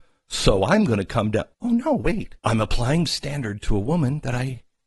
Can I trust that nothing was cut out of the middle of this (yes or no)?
no